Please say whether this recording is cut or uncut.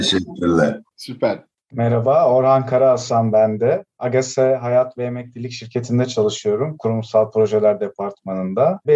uncut